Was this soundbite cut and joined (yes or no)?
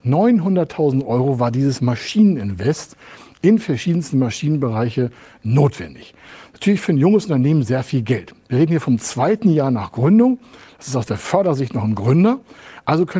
no